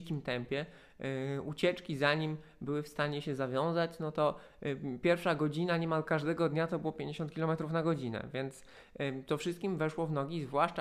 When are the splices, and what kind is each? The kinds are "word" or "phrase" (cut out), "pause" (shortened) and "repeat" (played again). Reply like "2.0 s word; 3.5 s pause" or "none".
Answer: none